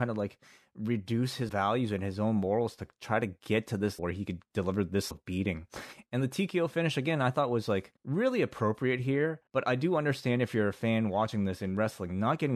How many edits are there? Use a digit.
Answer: 5